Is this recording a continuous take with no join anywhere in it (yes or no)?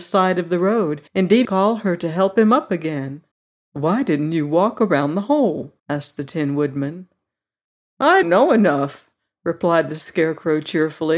no